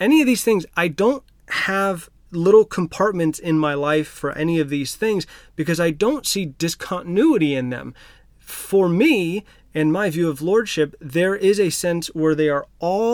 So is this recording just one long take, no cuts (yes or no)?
yes